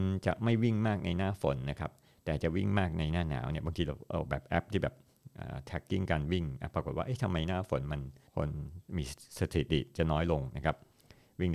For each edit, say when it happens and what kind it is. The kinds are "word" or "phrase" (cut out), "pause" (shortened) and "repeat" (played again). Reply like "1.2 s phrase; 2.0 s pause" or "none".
8.3 s pause